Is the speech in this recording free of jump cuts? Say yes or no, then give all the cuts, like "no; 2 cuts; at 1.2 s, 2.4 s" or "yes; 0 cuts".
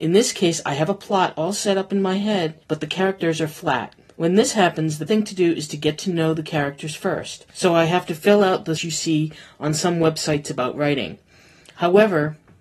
no; 5 cuts; at 2.6 s, 4.0 s, 5.1 s, 7.5 s, 8.8 s